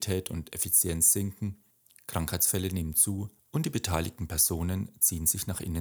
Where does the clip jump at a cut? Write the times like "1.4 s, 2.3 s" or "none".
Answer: 1.7 s, 3.4 s